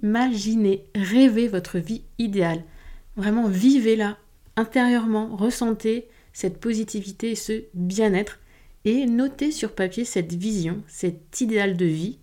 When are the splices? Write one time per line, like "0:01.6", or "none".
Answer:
none